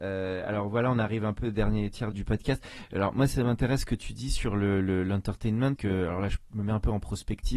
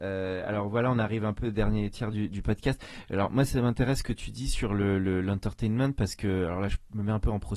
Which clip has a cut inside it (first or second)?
first